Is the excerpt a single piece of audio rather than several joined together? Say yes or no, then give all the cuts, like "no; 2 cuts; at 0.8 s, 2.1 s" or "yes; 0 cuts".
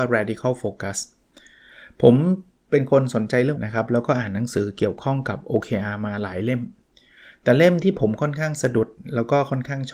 no; 1 cut; at 3.6 s